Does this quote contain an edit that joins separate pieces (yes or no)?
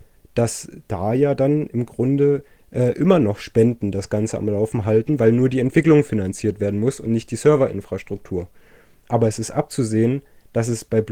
no